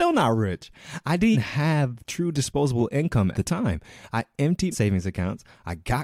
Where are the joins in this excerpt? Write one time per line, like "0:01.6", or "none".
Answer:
0:01.3
0:03.3
0:04.7